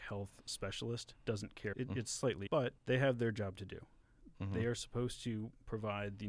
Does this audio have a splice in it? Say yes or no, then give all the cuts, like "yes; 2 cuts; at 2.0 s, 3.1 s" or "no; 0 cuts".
yes; 4 cuts; at 1.2 s, 1.7 s, 2.5 s, 2.8 s